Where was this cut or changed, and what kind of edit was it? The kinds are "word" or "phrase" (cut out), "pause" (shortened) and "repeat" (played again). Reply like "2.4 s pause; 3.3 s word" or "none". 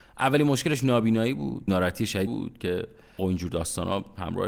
1.7 s word; 2.3 s word; 3.2 s word